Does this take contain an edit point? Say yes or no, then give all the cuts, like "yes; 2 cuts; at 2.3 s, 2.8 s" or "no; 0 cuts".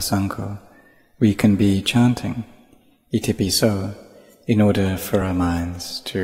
no; 0 cuts